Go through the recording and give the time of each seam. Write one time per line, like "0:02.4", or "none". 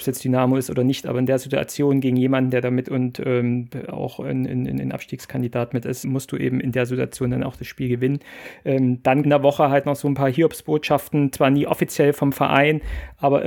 0:02.8
0:06.0
0:09.2